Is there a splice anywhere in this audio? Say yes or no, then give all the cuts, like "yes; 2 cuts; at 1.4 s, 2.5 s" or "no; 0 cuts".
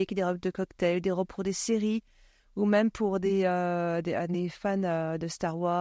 no; 0 cuts